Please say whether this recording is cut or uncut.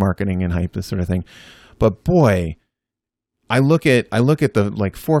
uncut